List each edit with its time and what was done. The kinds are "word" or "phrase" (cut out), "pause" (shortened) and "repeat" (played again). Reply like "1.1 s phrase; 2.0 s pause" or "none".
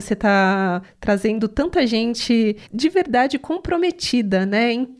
2.7 s pause